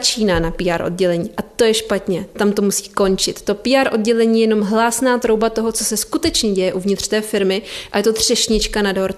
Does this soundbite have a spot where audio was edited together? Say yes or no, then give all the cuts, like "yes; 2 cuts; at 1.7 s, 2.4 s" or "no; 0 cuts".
no; 0 cuts